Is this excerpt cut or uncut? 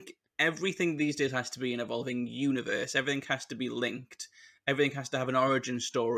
uncut